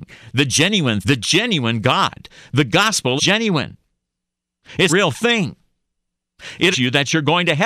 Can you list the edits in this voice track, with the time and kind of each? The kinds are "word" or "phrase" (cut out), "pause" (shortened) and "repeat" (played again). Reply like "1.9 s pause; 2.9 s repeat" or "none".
1.0 s word; 3.2 s word; 4.9 s word; 6.7 s word